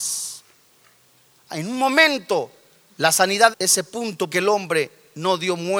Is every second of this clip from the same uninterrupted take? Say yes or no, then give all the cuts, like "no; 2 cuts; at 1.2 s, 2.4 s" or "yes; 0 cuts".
no; 2 cuts; at 3.5 s, 4.3 s